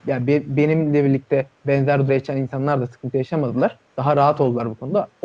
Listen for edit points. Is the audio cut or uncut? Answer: cut